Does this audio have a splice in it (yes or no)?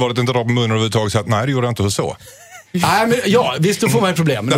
no